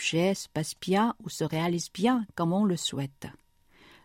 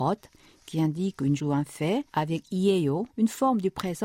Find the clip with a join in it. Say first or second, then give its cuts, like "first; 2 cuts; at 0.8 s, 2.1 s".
second; 3 cuts; at 1.4 s, 2.1 s, 3.1 s